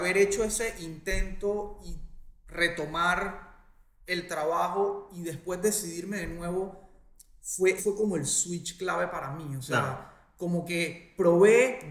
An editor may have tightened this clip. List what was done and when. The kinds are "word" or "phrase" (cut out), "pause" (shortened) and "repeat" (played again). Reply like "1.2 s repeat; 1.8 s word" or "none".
7.8 s word